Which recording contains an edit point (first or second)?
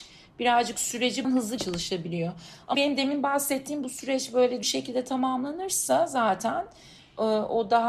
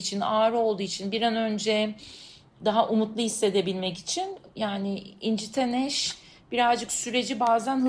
first